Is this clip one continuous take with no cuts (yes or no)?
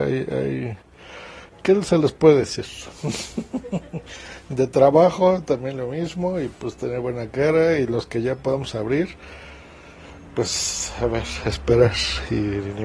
yes